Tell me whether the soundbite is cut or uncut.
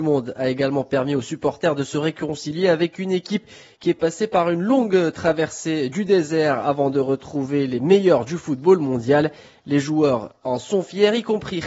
uncut